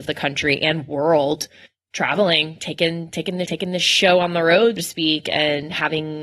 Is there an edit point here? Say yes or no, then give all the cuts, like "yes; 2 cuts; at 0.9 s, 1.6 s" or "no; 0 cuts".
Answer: yes; 3 cuts; at 1.7 s, 3.4 s, 4.8 s